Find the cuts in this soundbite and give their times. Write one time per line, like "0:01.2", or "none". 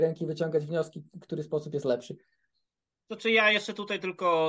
none

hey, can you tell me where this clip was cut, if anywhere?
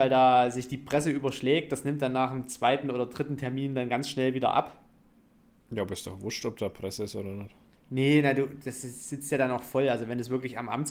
none

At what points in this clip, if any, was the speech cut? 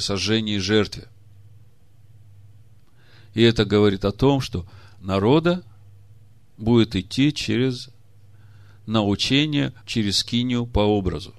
0:05.0

